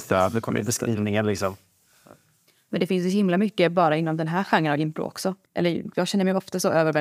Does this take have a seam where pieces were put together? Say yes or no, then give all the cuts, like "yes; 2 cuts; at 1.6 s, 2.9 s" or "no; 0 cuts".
yes; 1 cut; at 5.5 s